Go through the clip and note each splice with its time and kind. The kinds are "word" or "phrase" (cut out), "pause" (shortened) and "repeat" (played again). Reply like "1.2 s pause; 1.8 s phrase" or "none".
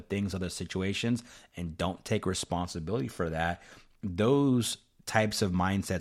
none